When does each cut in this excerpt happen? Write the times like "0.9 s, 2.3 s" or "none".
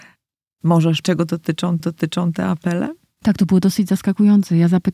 1.0 s, 1.8 s